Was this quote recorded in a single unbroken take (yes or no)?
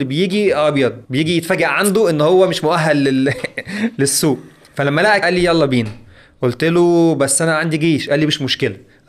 no